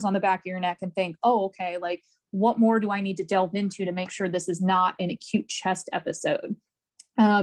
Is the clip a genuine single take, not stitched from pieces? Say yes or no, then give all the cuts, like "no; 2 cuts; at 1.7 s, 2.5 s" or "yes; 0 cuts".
yes; 0 cuts